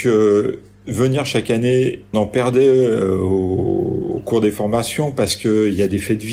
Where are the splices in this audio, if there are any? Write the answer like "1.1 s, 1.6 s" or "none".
2.1 s